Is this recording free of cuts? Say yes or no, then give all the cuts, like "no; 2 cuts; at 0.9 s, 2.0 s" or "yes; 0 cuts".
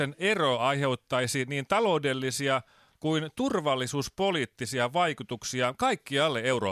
yes; 0 cuts